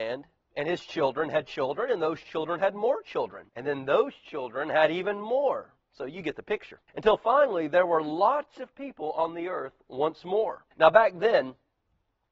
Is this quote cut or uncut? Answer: cut